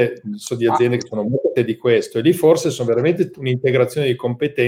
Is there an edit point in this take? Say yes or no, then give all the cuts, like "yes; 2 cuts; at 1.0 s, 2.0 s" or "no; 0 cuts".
yes; 1 cut; at 1.6 s